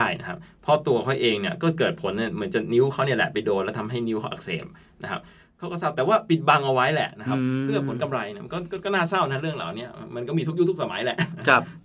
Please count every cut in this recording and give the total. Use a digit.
0